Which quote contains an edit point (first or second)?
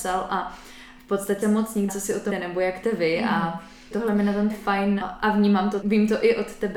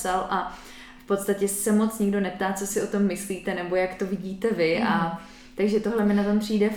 first